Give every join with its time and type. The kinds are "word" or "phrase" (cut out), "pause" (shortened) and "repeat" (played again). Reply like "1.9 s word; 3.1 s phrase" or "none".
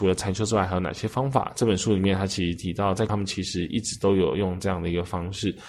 3.1 s phrase